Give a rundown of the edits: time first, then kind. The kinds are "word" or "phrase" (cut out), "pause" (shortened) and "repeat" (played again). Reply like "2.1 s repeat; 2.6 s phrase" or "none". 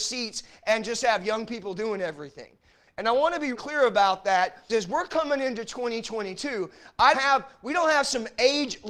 3.5 s word; 4.7 s word; 7.1 s word